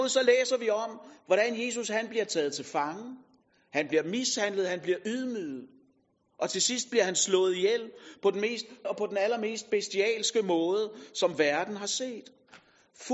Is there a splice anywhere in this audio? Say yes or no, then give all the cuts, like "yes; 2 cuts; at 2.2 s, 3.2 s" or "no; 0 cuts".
yes; 1 cut; at 8.8 s